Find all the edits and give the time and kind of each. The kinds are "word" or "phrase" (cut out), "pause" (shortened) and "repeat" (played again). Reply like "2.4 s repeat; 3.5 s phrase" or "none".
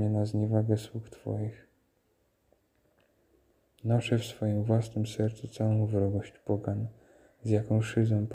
none

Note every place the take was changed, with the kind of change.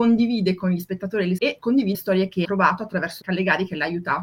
1.4 s word; 1.9 s word; 2.4 s word; 3.2 s word

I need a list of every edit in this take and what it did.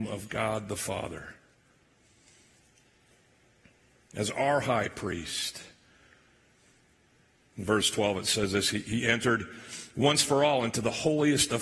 none

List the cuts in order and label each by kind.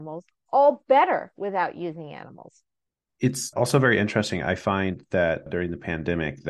none

